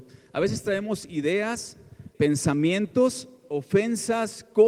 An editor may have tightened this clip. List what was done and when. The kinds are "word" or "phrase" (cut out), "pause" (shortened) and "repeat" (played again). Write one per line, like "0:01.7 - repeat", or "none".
0:02.1 - word